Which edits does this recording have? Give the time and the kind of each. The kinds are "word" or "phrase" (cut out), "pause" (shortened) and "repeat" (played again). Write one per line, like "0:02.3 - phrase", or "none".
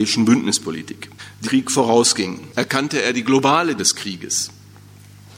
0:01.4 - word
0:03.8 - word